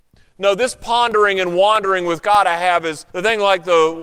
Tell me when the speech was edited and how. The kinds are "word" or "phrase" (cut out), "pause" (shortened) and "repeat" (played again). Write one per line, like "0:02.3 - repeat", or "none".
0:03.1 - pause